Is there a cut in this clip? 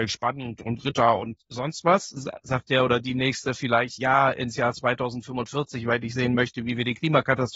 no; 0 cuts

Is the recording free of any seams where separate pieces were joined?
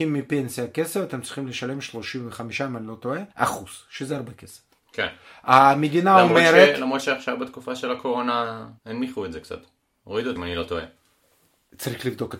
no; 3 cuts; at 3.3 s, 8.8 s, 10.4 s

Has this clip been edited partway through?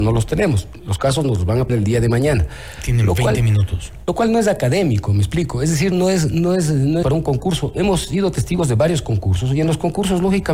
yes; 3 cuts; at 1.7 s, 5.9 s, 7.0 s

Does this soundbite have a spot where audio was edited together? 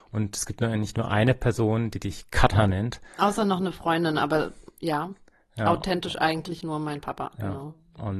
no; 0 cuts

